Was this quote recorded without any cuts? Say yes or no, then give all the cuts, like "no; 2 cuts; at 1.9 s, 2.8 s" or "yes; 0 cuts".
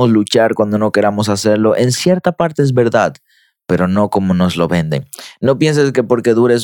yes; 0 cuts